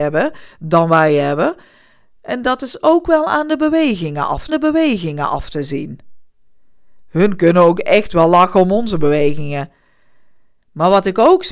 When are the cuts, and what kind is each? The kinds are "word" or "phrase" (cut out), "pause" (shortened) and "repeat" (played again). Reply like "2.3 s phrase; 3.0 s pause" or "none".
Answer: 4.5 s repeat